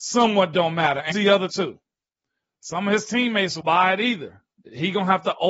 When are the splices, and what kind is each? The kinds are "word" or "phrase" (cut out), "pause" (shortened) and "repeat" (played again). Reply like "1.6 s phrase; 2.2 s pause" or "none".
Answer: 1.1 s word; 1.5 s word; 3.6 s word